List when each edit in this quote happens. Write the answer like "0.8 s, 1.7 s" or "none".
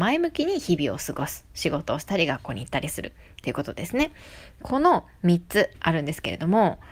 5.7 s